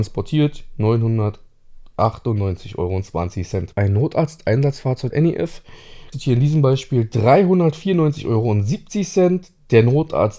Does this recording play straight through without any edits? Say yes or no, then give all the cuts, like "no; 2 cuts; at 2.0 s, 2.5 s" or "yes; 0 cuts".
no; 3 cuts; at 3.7 s, 5.1 s, 6.1 s